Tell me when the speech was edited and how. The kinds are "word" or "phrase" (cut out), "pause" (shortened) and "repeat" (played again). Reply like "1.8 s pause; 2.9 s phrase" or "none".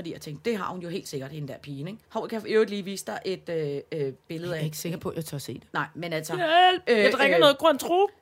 2.0 s pause